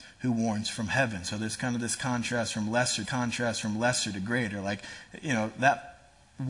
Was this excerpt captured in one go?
no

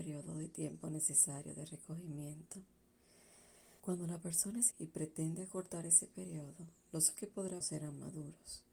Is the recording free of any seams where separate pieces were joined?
no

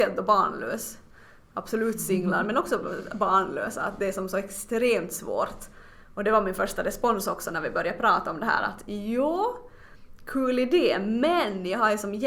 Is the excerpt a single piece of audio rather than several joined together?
yes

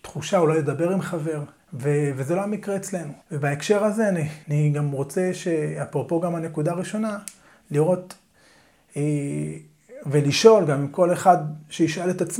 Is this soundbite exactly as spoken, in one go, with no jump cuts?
no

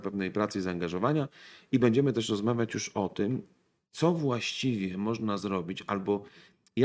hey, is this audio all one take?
yes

